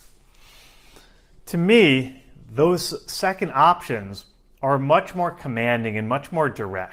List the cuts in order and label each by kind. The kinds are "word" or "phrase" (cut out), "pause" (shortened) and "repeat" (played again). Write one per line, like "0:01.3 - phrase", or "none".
none